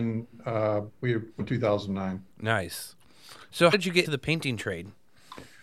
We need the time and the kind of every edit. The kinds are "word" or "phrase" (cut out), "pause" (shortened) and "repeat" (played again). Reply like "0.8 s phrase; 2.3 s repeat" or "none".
0.9 s pause; 1.4 s phrase; 2.3 s pause; 3.7 s word; 4.0 s word